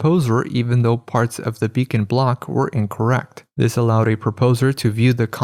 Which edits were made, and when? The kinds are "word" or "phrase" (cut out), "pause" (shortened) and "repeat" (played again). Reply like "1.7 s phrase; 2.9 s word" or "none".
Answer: none